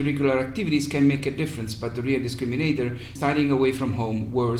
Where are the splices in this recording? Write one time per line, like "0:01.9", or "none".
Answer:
0:03.2